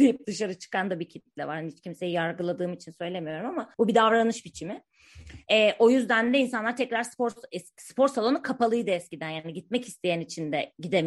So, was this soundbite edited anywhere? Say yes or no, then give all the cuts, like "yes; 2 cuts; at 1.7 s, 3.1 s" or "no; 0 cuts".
yes; 1 cut; at 3.7 s